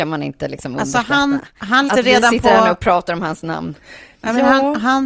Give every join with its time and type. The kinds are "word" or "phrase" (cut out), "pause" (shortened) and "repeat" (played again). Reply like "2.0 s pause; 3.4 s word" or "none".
1.9 s word

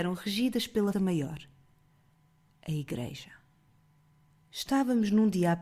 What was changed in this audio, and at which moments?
0.9 s word

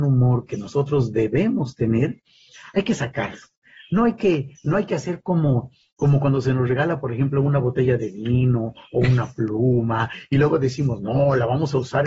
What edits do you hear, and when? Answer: none

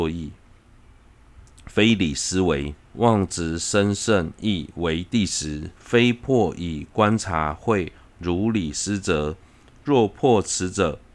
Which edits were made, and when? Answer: 2.8 s pause; 5.8 s pause

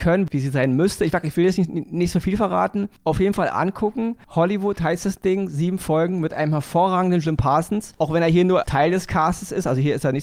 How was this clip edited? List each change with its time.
none

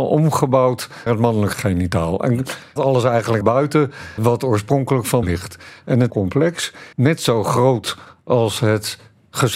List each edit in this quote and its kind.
1.1 s word; 2.8 s word; 3.4 s word; 4.2 s word; 5.2 s word; 6.1 s word; 6.9 s word

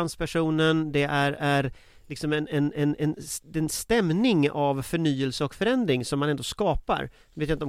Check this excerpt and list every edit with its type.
none

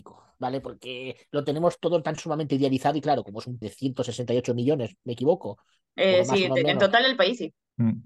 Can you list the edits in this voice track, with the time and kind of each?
3.6 s phrase

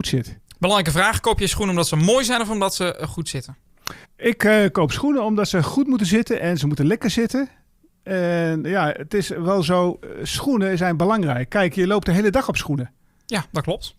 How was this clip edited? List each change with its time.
4.0 s pause

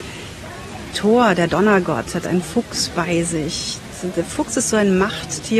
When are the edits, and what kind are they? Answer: 0.9 s word

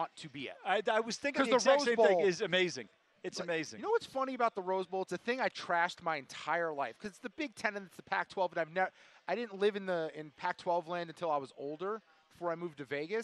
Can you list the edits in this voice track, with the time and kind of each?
none

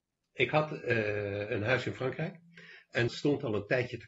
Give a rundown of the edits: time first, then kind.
3.1 s word

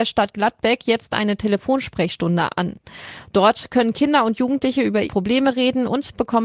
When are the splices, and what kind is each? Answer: 5.0 s word

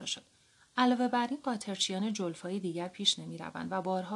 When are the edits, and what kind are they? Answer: none

